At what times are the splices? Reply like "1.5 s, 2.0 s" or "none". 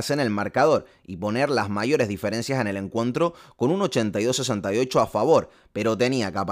none